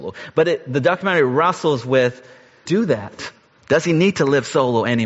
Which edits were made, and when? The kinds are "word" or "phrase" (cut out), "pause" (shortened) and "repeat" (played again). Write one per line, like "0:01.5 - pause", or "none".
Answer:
0:02.7 - phrase